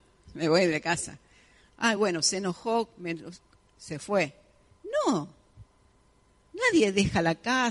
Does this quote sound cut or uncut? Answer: uncut